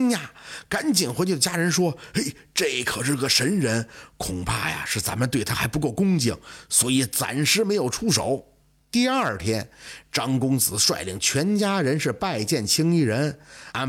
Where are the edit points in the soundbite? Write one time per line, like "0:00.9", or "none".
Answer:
none